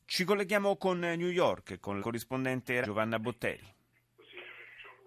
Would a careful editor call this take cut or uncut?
cut